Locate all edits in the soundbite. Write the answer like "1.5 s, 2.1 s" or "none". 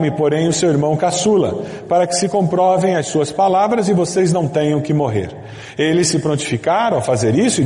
none